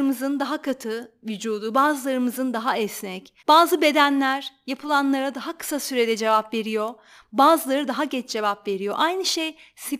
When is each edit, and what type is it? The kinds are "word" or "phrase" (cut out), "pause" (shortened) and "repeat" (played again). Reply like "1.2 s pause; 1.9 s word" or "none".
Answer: 3.4 s pause